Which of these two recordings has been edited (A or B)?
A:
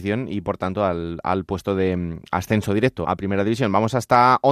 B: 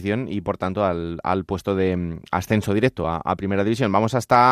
A